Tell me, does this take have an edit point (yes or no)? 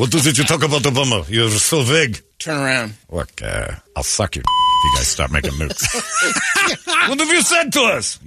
yes